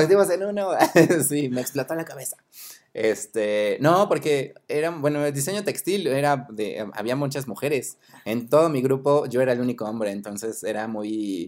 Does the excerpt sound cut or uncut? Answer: uncut